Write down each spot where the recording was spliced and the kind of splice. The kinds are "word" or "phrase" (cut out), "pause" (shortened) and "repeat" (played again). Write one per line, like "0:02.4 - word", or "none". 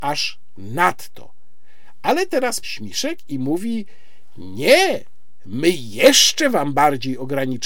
0:02.6 - phrase